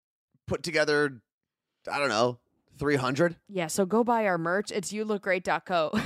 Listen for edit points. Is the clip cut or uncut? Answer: uncut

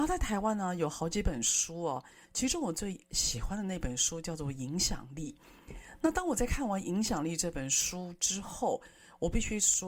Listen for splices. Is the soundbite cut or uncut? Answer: uncut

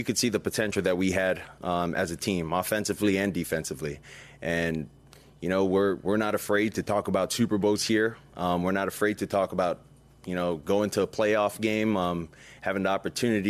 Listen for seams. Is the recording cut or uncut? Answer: uncut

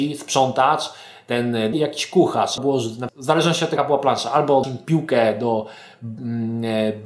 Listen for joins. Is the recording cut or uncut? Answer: cut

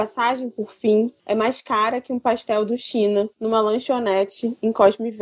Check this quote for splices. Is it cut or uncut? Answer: cut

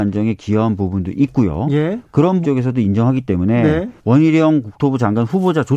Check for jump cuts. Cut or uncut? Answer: cut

